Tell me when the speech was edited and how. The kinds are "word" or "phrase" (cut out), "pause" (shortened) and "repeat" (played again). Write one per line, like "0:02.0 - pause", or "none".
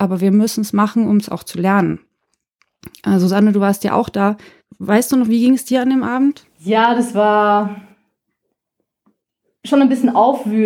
none